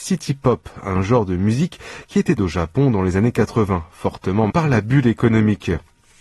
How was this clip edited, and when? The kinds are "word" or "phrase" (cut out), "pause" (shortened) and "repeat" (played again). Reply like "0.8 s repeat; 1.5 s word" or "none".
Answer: 2.4 s phrase; 4.5 s word